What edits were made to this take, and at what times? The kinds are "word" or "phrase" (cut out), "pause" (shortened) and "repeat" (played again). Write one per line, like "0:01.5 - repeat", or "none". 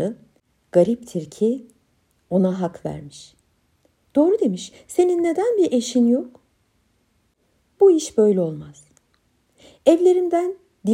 none